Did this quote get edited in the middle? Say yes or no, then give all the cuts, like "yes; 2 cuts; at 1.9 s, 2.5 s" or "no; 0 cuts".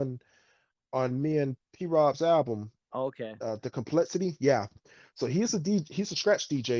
no; 0 cuts